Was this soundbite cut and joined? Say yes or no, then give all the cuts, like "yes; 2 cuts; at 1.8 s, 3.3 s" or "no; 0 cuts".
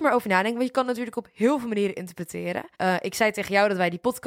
yes; 1 cut; at 2.7 s